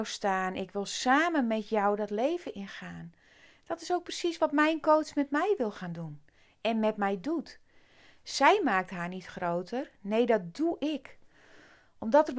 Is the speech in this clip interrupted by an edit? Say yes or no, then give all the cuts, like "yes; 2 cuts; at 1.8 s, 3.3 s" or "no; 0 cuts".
no; 0 cuts